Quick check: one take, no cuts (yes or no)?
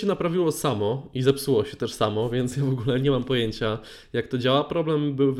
yes